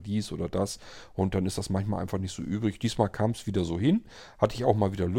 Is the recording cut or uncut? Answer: uncut